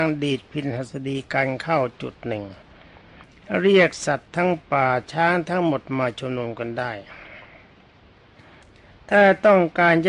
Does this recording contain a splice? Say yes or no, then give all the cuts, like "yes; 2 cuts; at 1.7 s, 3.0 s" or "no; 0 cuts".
no; 0 cuts